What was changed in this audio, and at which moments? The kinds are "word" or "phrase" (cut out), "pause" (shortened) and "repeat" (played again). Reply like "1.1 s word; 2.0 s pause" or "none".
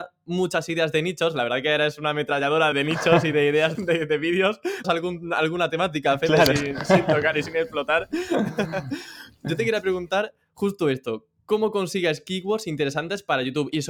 2.7 s word; 3.7 s word; 4.8 s word